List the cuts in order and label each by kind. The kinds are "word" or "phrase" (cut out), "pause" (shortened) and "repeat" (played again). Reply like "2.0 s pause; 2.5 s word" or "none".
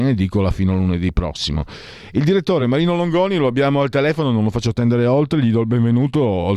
none